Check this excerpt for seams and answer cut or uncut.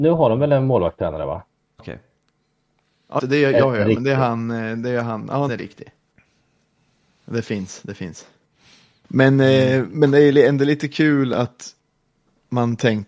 cut